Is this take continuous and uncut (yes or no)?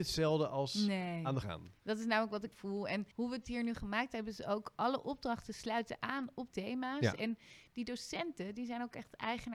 no